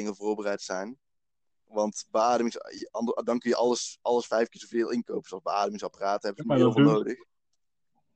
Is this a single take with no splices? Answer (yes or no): yes